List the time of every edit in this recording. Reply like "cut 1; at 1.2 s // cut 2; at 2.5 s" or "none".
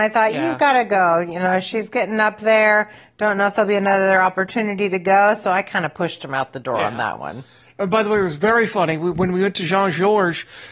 none